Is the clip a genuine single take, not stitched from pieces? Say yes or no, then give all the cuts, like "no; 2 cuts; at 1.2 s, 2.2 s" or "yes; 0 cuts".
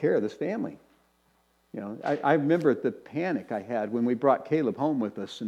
yes; 0 cuts